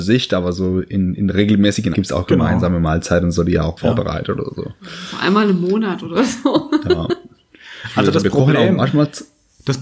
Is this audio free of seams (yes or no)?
no